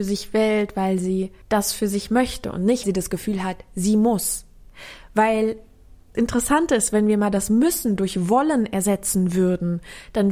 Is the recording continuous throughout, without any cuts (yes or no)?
no